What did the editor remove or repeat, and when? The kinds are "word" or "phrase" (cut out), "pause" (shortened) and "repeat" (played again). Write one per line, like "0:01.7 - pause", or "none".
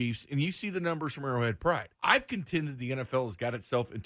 0:01.9 - pause